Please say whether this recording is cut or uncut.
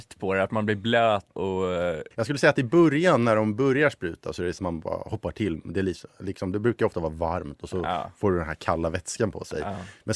cut